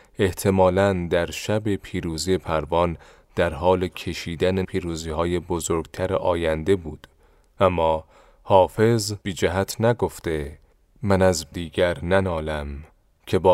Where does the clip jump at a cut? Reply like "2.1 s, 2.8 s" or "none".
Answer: 4.6 s, 9.2 s, 11.5 s